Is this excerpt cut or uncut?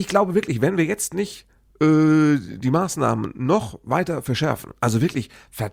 uncut